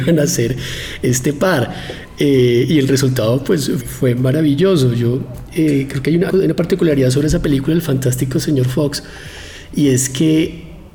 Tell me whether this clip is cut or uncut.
cut